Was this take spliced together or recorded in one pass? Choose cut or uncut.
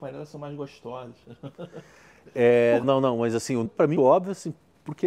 cut